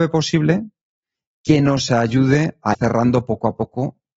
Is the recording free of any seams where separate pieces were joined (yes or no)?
no